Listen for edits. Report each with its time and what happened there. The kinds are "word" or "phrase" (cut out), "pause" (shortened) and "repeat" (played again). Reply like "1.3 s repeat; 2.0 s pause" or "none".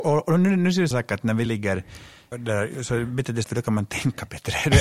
0.9 s word; 1.5 s word; 2.3 s word; 3.4 s word